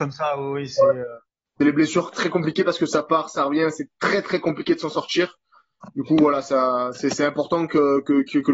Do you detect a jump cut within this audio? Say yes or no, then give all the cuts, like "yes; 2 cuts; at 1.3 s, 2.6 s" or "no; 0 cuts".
no; 0 cuts